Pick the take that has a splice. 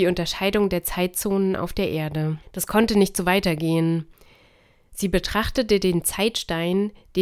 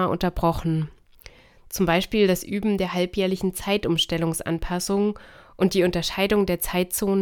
first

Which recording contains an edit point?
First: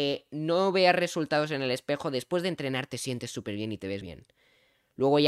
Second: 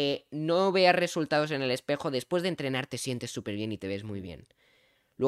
first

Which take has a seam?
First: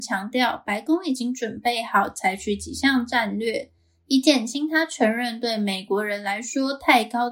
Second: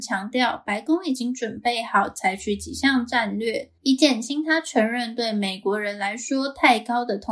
second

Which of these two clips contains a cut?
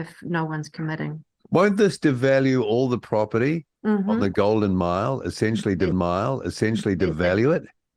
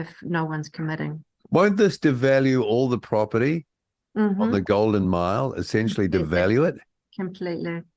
first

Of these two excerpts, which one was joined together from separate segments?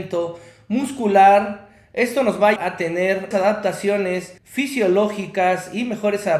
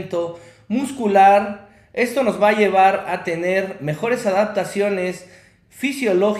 first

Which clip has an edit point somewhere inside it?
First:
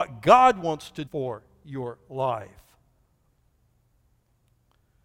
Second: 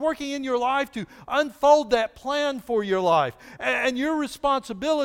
first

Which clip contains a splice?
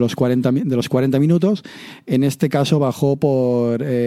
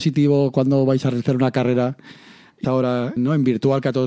second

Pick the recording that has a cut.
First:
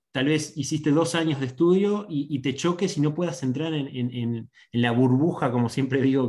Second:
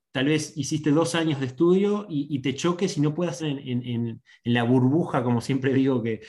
second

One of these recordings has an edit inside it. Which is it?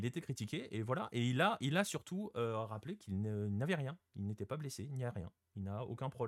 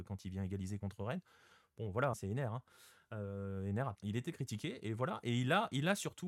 second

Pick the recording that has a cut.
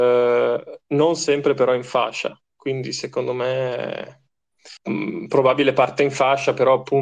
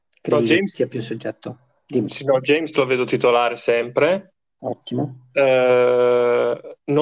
first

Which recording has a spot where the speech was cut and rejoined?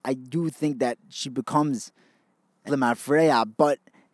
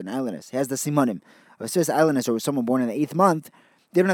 first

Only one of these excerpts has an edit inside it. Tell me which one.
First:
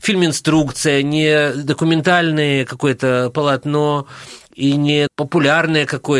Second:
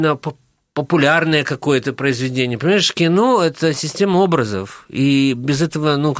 first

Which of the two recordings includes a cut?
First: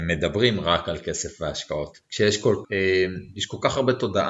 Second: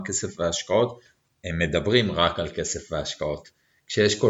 first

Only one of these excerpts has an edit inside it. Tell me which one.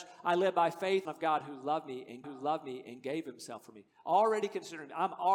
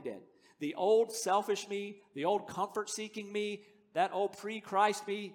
first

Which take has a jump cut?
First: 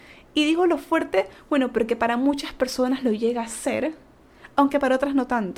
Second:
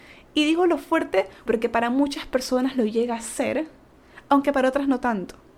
second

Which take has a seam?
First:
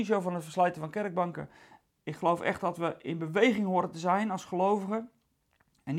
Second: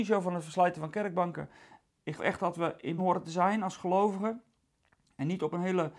second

